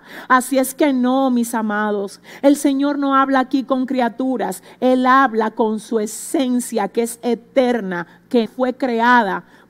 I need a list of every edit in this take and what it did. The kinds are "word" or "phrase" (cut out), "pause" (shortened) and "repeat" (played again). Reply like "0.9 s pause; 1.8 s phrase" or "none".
8.5 s word